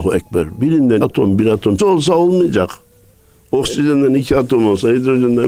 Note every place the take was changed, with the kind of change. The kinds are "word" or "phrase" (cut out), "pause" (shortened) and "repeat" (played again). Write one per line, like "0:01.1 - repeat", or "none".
0:01.0 - word
0:01.4 - word
0:01.8 - word